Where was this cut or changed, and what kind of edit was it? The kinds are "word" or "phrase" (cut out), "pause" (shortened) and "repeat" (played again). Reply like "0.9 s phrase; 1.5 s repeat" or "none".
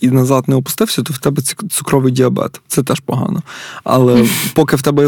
none